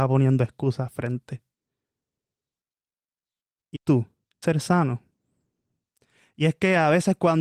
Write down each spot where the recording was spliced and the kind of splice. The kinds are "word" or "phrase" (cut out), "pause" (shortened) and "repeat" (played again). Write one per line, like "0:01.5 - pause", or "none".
0:03.7 - word
0:04.4 - word